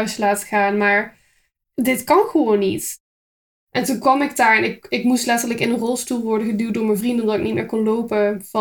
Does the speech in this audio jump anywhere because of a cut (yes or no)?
no